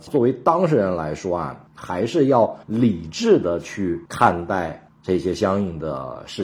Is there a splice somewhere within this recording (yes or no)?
yes